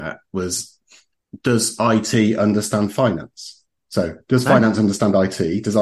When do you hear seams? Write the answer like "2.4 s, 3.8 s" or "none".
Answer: none